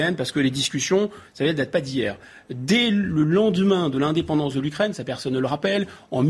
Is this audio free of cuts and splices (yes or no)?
yes